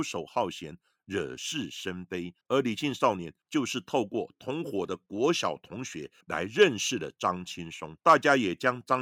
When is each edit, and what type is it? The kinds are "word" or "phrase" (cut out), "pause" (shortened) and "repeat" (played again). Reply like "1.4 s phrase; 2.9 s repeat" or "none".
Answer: 2.4 s pause; 6.2 s pause; 8.0 s pause